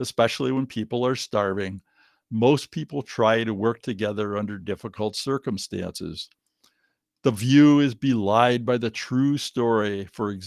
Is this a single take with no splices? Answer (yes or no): yes